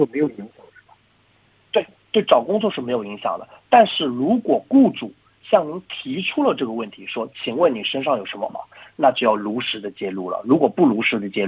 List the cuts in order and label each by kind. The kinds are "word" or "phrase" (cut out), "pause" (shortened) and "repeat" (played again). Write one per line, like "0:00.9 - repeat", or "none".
0:08.5 - word